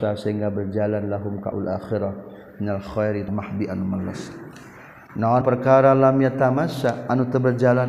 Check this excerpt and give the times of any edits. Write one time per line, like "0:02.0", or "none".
0:01.5
0:03.3
0:05.4